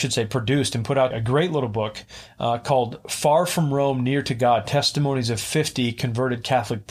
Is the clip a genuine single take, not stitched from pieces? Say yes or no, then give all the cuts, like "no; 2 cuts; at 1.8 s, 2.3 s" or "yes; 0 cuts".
no; 1 cut; at 1.1 s